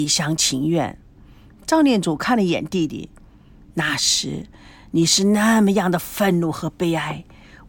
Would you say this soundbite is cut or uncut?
uncut